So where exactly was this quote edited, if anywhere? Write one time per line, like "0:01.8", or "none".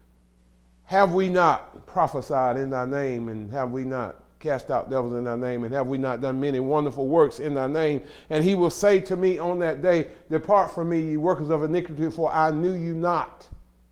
none